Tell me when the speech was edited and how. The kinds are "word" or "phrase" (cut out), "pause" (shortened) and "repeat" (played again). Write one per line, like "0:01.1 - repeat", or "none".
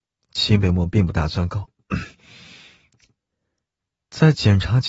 0:02.1 - pause